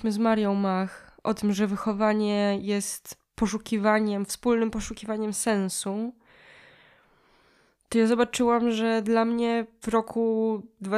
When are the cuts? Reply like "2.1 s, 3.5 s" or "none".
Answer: 9.8 s